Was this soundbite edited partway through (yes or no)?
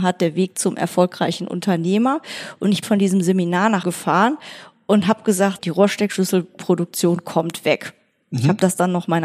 yes